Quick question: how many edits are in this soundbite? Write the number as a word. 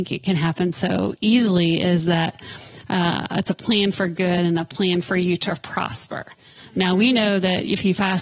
zero